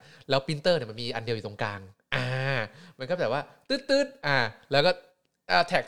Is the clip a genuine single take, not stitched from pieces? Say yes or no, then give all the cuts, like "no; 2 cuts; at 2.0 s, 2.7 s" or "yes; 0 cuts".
yes; 0 cuts